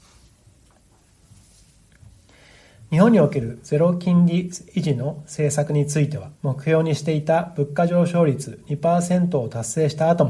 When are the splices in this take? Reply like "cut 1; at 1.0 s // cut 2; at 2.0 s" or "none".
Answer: cut 1; at 6.4 s